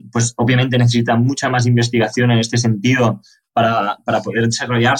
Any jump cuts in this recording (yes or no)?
no